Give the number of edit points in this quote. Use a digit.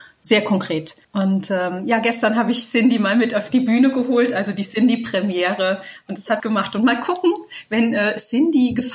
2